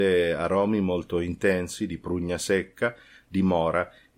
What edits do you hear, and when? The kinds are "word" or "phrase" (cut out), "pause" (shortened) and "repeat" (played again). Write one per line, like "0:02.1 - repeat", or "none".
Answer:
none